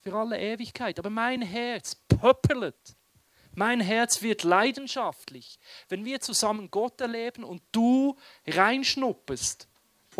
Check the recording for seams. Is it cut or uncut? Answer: uncut